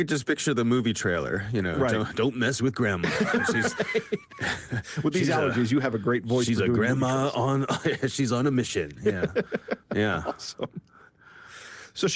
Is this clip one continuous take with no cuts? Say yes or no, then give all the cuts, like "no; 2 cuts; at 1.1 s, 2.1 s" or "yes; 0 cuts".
yes; 0 cuts